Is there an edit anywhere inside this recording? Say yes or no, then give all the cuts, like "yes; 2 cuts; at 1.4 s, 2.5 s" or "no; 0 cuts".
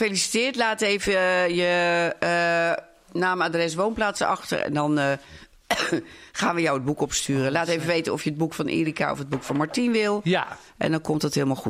no; 0 cuts